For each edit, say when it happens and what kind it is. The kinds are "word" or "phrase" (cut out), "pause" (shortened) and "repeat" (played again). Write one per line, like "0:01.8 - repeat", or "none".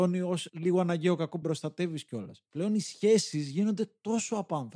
0:01.4 - word